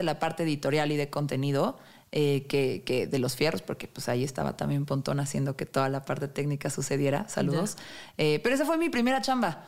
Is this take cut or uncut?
uncut